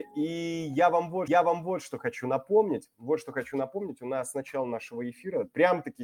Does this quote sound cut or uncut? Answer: cut